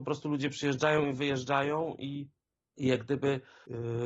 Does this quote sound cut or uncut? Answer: uncut